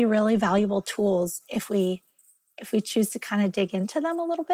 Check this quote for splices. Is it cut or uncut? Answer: uncut